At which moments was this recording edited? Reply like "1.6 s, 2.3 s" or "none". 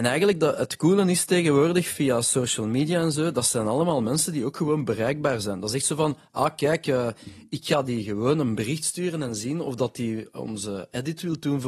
none